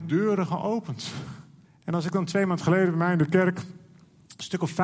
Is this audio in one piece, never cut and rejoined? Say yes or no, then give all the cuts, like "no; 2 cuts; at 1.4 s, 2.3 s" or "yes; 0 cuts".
no; 1 cut; at 1.6 s